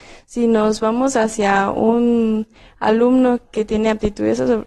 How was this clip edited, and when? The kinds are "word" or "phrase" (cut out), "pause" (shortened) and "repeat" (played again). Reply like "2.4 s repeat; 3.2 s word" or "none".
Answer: none

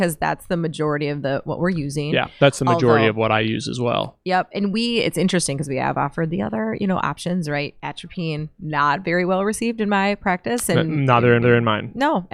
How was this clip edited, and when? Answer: 11.4 s repeat

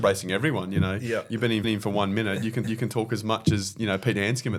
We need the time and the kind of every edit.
1.6 s repeat; 2.6 s repeat

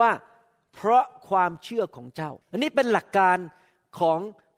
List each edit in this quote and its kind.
2.4 s pause

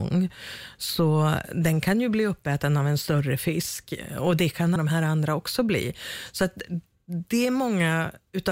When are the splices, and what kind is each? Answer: 4.8 s word

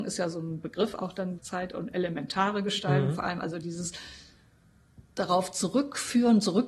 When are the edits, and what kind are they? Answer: 1.4 s word; 5.0 s word

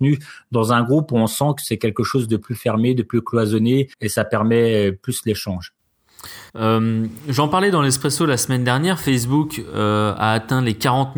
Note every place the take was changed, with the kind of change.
3.9 s pause; 6.5 s pause

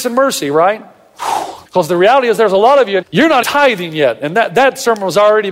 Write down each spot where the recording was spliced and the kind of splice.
1.6 s pause; 3.0 s word; 3.4 s word

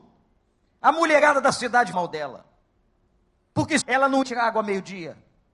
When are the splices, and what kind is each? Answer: 1.9 s word; 3.8 s word; 4.2 s word

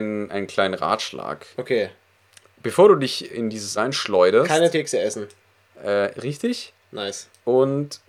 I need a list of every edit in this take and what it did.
3.3 s word; 3.8 s word; 4.7 s word

